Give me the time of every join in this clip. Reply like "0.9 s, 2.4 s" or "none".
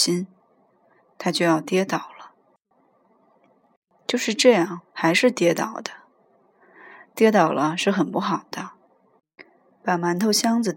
4.9 s